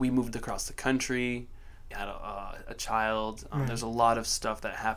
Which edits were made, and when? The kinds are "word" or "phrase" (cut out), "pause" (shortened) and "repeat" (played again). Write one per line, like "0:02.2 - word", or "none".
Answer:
0:01.9 - word